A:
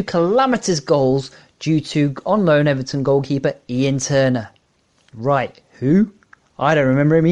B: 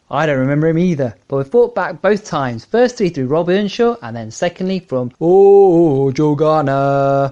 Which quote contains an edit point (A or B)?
B